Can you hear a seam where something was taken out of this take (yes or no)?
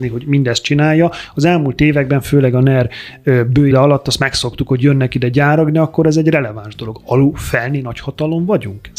yes